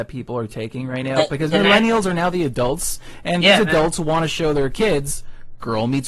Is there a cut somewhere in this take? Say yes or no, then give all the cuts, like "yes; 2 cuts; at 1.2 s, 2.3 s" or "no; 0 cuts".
no; 0 cuts